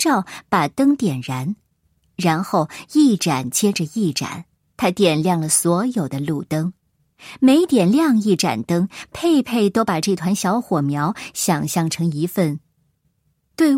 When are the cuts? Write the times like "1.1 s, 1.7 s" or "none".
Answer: 4.7 s